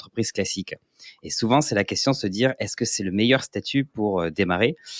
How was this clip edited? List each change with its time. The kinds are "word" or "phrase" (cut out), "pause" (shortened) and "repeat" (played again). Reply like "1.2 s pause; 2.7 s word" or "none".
none